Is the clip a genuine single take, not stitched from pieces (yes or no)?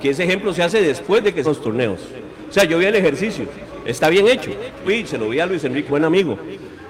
no